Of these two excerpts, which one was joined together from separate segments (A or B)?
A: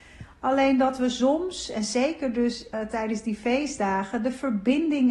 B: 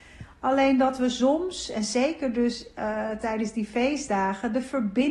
A